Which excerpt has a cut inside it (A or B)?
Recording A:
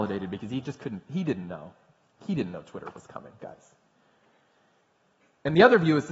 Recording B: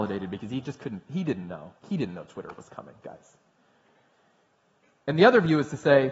B